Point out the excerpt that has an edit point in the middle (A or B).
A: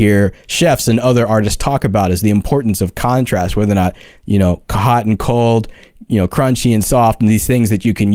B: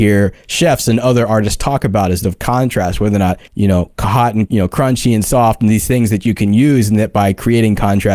B